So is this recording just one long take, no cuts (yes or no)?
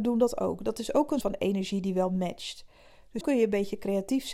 no